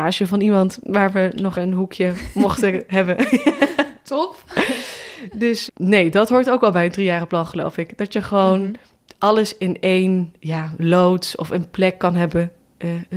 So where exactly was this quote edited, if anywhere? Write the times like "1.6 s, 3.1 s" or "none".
1.5 s, 5.7 s